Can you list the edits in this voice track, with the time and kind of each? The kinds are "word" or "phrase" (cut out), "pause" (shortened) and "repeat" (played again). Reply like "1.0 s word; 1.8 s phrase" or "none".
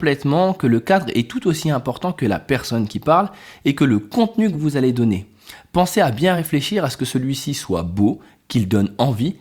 none

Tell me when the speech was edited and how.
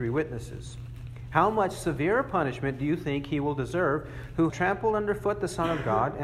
4.5 s word

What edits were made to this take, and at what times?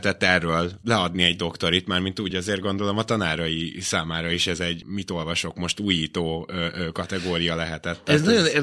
2.3 s phrase

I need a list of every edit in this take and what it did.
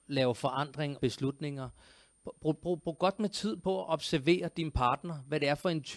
1.0 s phrase

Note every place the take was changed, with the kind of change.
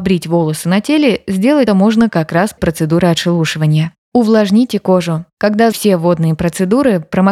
1.7 s word; 2.6 s word; 5.7 s word

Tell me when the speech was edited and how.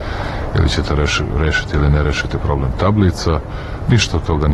none

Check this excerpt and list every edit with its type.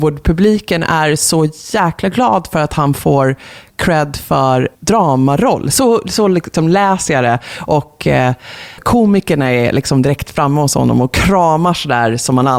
4.7 s word; 8.8 s word

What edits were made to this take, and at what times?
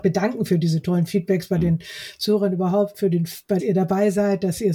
3.6 s phrase

